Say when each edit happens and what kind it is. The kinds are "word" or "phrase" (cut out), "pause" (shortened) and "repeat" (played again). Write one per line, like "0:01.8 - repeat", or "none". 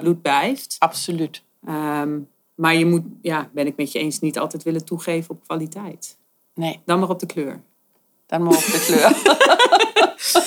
none